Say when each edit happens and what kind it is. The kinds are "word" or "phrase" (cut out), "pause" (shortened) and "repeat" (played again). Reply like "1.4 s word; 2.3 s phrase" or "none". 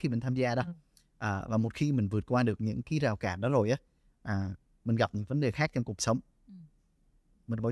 none